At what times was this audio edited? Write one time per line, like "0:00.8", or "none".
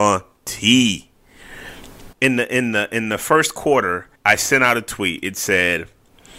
0:02.1
0:04.2